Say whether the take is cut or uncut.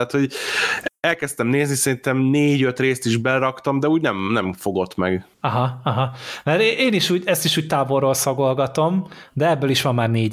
cut